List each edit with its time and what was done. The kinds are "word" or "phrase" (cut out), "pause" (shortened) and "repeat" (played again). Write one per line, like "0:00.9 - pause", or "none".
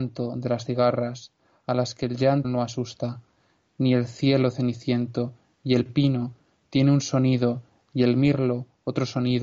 0:02.4 - word